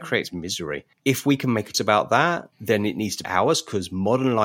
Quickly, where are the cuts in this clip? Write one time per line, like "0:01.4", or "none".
0:00.9
0:01.7
0:02.5
0:03.2